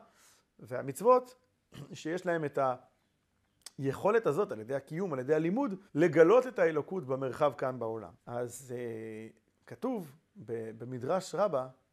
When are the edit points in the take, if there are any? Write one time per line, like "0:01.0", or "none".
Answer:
0:05.9
0:08.2
0:09.5